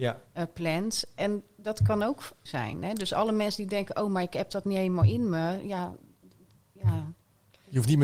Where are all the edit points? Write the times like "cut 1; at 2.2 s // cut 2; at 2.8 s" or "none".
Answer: cut 1; at 2.5 s